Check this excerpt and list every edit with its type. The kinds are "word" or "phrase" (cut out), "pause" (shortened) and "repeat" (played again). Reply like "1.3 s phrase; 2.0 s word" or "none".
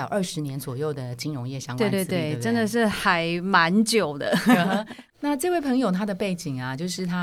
5.1 s pause